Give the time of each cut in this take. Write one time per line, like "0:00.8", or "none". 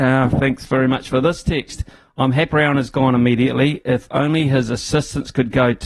0:02.5